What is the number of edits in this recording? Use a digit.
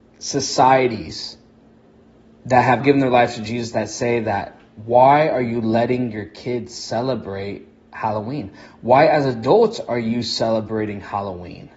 1